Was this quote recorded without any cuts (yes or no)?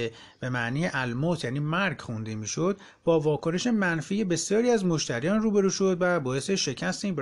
yes